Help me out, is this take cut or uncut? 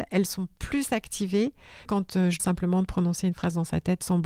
cut